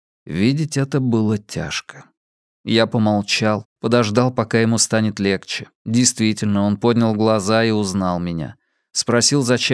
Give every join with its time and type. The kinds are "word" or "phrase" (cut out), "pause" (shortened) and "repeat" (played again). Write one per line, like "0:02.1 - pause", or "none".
0:03.7 - pause
0:05.7 - pause

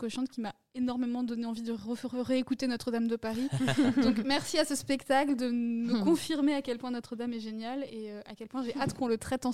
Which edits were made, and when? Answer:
none

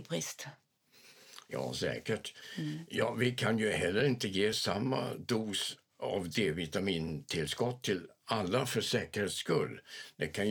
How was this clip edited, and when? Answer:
none

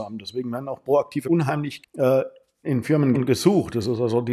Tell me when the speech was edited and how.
0:01.2 - word
0:01.8 - word
0:02.6 - word
0:03.1 - word

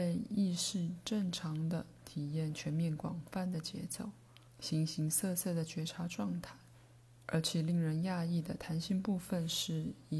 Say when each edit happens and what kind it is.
0:04.5 - pause
0:06.9 - pause

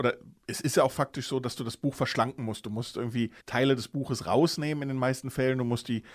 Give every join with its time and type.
0:03.4 - pause

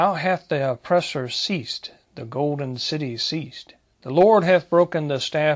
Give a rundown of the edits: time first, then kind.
none

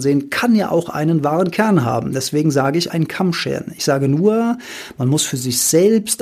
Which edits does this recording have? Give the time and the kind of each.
0:02.9 - phrase

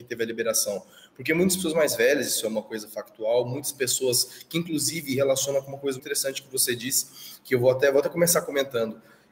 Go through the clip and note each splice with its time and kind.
0:06.0 - word

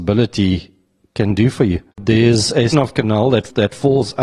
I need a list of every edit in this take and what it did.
0:01.9 - pause
0:02.7 - word

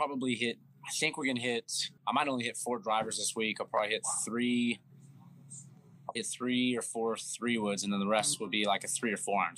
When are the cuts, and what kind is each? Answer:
0:02.0 - pause
0:06.2 - word

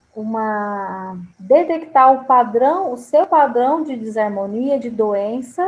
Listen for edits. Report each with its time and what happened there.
0:01.3 - pause

